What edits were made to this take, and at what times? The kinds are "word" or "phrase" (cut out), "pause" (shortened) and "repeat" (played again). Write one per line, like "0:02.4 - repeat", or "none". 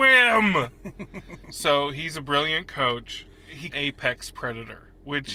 0:03.7 - phrase